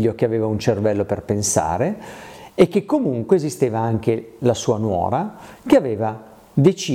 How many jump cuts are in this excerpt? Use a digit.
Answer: 0